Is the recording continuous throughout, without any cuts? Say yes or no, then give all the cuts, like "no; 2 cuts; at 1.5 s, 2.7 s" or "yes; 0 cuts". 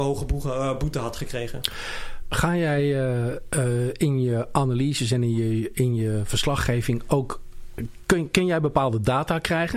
yes; 0 cuts